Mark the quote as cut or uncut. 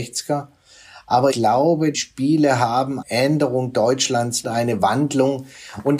cut